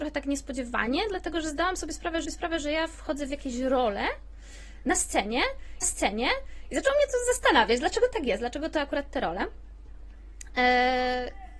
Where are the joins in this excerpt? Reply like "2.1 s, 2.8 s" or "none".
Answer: 2.2 s, 5.8 s

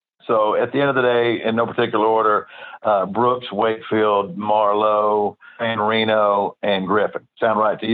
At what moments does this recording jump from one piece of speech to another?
5.6 s

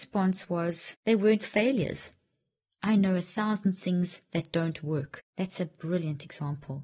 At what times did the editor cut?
5.3 s

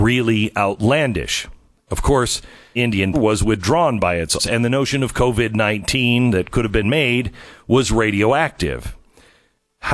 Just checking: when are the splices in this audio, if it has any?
2.8 s, 3.1 s, 4.4 s, 6.8 s

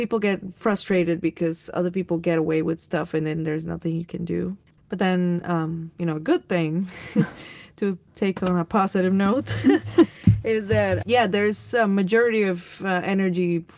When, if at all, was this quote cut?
none

